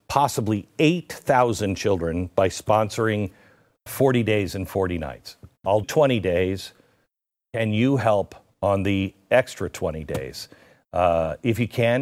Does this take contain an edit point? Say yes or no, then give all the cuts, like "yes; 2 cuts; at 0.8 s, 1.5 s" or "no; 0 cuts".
yes; 2 cuts; at 3.9 s, 5.8 s